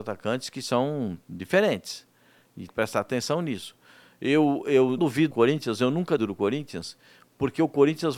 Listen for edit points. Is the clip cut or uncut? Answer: cut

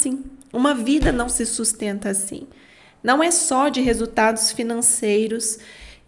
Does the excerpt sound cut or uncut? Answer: uncut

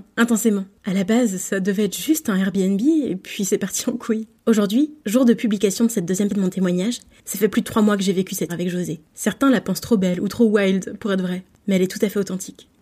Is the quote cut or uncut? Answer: cut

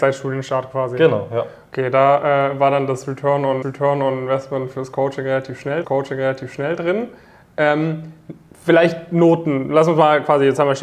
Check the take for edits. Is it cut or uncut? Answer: cut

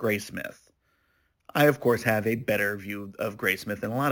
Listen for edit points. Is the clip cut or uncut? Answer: uncut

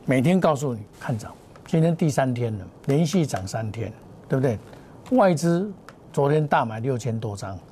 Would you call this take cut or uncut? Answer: cut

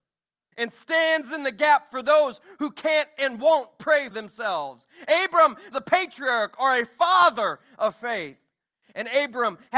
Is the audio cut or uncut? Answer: cut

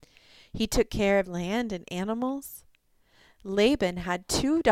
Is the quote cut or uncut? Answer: cut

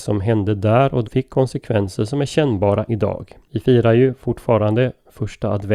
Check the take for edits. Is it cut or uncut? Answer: cut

